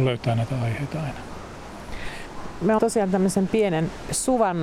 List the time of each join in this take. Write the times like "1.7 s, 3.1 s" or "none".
2.8 s